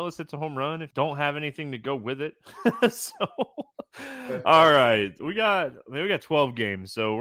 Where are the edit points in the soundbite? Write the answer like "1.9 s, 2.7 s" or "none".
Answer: 0.9 s